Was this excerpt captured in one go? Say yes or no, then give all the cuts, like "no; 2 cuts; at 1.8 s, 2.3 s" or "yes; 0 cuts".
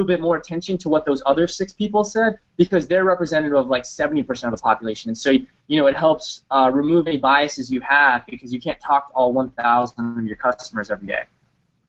yes; 0 cuts